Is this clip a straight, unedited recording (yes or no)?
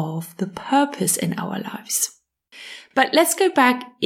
yes